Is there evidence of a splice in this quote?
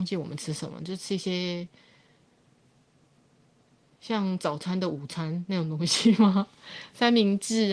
no; 0 cuts

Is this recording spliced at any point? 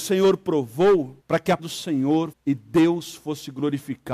yes; 3 cuts; at 1.2 s, 1.6 s, 2.3 s

